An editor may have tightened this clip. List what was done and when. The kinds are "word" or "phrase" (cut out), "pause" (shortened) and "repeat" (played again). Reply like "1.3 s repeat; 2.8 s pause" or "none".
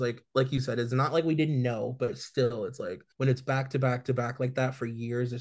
3.1 s pause